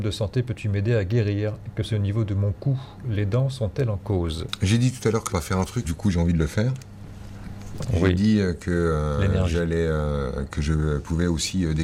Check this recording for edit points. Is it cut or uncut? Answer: cut